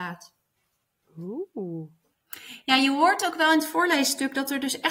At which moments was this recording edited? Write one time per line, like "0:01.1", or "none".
none